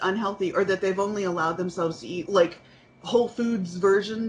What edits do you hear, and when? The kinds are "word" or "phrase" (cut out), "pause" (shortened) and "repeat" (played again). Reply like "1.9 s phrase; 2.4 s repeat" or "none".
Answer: 2.2 s word